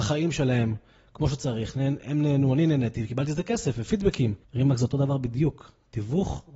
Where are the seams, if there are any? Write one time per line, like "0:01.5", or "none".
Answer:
0:04.4